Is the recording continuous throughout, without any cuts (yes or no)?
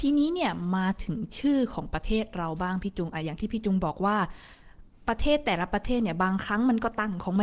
yes